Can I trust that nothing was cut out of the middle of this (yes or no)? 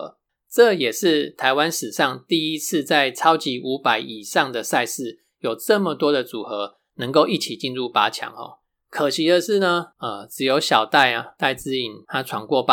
yes